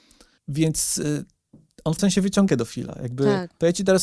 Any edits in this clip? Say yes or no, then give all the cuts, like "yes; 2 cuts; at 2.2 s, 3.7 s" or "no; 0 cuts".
yes; 2 cuts; at 2.0 s, 2.5 s